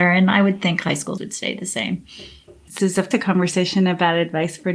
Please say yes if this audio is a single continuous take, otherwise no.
no